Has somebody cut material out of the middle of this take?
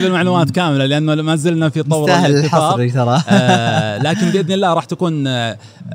no; 0 cuts

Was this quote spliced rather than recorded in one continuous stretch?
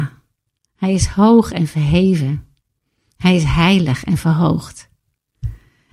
no; 0 cuts

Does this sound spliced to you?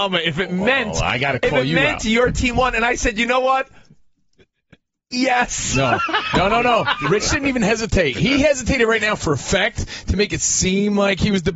no; 0 cuts

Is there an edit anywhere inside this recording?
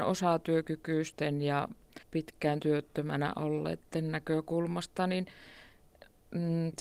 yes; 1 cut; at 2.0 s

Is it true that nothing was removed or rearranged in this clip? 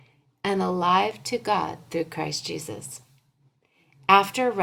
yes; 0 cuts

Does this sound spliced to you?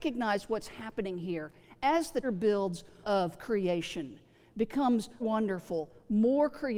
yes; 3 cuts; at 2.2 s, 3.0 s, 5.2 s

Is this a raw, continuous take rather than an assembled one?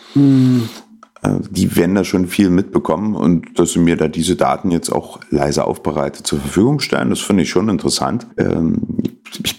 no; 1 cut; at 8.3 s

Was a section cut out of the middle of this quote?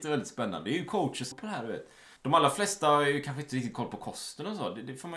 yes; 2 cuts; at 1.3 s, 2.2 s

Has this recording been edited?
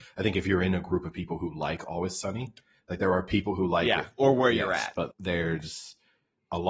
yes; 1 cut; at 5.1 s

